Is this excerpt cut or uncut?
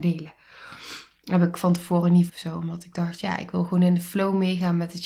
cut